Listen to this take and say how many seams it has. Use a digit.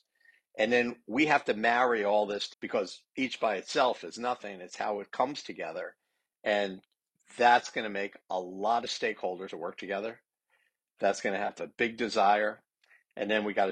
3